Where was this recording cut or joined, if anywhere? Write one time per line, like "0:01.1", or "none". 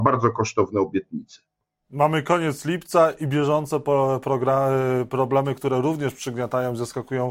none